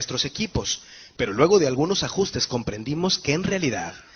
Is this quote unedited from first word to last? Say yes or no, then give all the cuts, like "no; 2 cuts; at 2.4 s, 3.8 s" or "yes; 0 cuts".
yes; 0 cuts